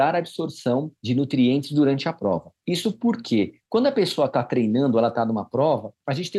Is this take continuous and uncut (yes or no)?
yes